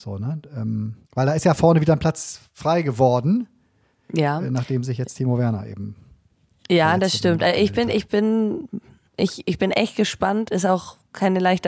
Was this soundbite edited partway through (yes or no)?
yes